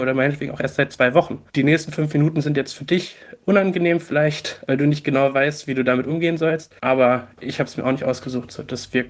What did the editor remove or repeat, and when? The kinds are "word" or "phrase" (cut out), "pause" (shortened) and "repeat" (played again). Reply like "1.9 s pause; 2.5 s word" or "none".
1.5 s pause; 6.8 s pause